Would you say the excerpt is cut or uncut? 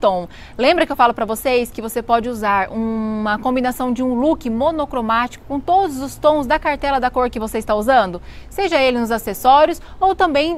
uncut